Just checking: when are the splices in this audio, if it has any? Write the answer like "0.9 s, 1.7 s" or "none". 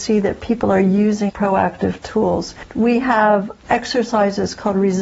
1.3 s